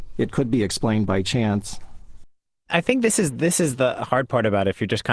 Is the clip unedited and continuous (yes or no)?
yes